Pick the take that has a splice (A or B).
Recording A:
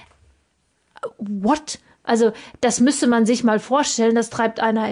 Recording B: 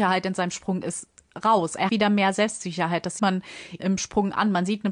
B